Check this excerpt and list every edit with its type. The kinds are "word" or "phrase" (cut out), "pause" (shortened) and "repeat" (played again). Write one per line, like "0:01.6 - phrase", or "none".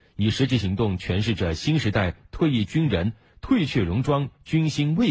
none